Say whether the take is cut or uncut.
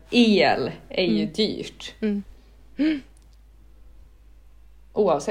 uncut